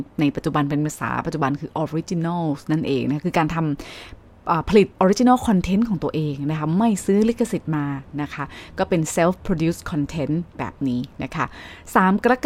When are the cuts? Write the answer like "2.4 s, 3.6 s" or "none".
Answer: 4.9 s